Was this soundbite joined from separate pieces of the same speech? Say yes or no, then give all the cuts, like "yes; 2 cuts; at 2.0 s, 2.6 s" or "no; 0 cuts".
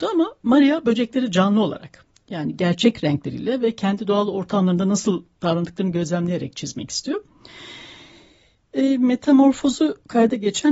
no; 0 cuts